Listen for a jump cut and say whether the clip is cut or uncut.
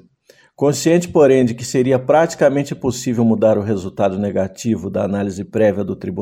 uncut